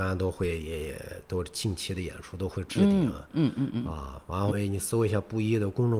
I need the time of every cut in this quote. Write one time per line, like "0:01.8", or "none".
0:04.5

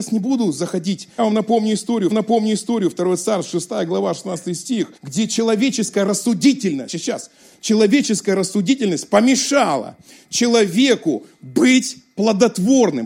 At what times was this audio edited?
0:01.2
0:02.1
0:05.0
0:06.9

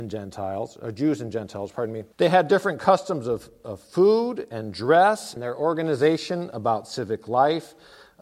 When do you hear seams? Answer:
0:02.1
0:05.4

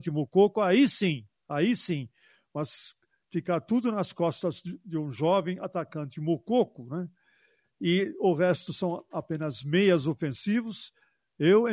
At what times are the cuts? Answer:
none

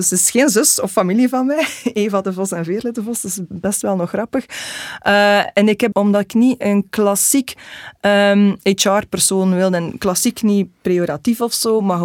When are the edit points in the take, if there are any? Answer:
0:05.9

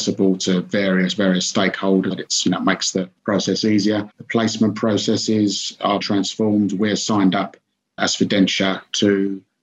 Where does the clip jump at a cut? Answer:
0:01.2
0:02.1
0:03.2
0:04.1
0:06.0
0:08.0

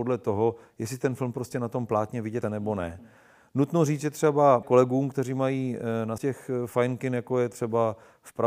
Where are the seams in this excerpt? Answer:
0:02.4
0:04.6
0:06.2

